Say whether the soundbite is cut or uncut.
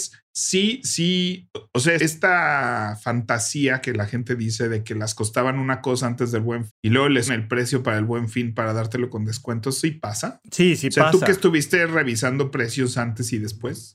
cut